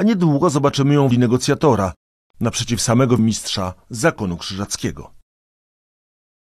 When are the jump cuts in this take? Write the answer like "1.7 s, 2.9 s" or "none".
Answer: 1.1 s, 3.2 s